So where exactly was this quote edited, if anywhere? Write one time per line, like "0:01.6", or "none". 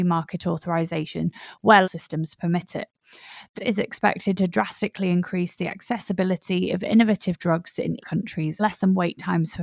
0:01.8
0:03.6
0:08.0
0:08.6